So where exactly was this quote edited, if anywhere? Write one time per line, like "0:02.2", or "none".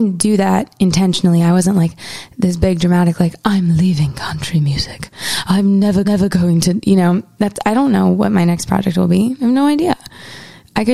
0:06.0